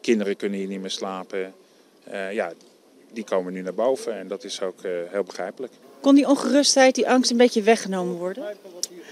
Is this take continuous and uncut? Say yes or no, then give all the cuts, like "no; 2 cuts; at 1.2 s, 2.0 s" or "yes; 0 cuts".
yes; 0 cuts